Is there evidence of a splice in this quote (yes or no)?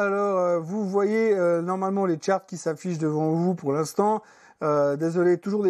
no